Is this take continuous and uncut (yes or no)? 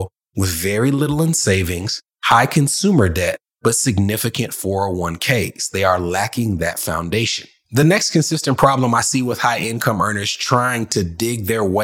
yes